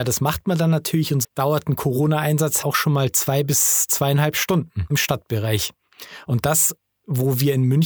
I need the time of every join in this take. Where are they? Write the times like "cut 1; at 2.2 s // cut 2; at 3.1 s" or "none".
cut 1; at 1.2 s // cut 2; at 2.6 s // cut 3; at 4.9 s